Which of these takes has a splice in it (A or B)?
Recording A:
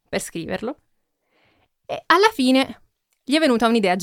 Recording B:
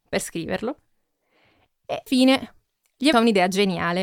B